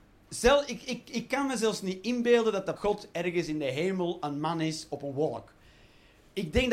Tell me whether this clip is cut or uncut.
cut